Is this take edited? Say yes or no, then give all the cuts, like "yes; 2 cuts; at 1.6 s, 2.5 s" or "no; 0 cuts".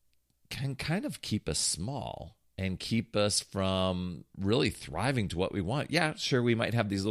no; 0 cuts